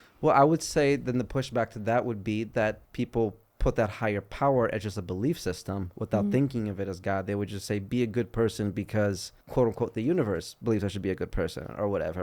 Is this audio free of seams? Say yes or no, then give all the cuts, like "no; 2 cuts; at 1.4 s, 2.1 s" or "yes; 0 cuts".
no; 2 cuts; at 2.8 s, 9.4 s